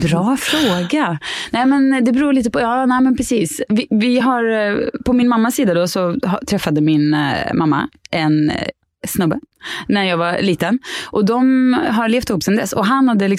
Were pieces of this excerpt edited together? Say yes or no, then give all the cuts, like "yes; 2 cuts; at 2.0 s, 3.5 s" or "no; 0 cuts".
no; 0 cuts